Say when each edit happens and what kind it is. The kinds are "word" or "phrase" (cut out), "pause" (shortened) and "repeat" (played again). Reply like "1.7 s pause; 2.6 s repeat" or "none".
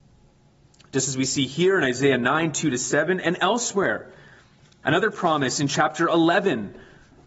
none